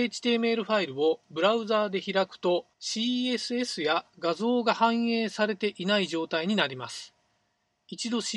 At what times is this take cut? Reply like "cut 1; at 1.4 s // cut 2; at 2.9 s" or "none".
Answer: cut 1; at 2.7 s